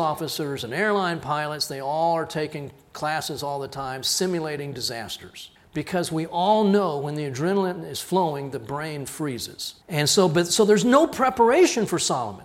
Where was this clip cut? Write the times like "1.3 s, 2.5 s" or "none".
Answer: 5.6 s, 9.8 s